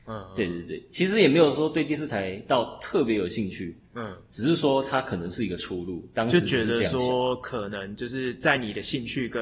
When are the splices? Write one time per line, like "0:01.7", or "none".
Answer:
none